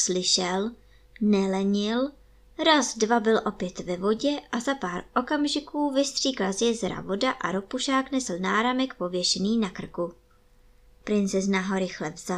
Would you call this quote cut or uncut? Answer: uncut